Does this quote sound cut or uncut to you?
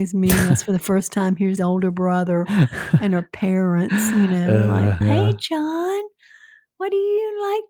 cut